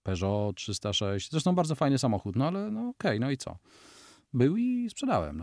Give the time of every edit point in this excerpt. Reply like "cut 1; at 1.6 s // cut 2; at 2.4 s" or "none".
none

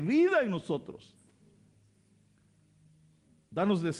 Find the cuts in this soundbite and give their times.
none

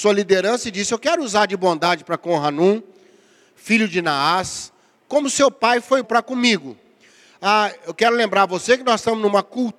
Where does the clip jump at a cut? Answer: cut 1; at 6.0 s

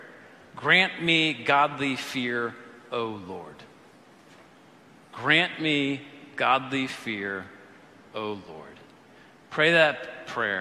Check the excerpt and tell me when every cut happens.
none

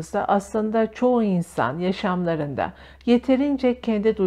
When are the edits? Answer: none

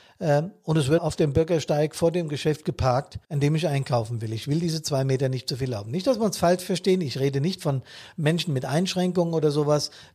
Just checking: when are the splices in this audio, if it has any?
cut 1; at 1.0 s // cut 2; at 3.2 s

